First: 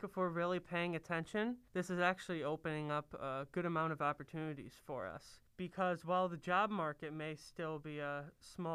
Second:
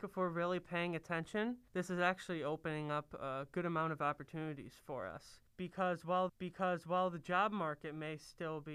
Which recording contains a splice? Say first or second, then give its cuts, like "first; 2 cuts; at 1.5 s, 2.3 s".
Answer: second; 1 cut; at 6.3 s